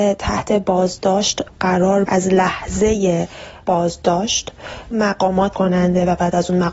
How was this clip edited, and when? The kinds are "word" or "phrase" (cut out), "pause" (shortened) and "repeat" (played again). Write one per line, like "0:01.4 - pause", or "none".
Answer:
0:02.1 - word
0:04.9 - word
0:05.5 - word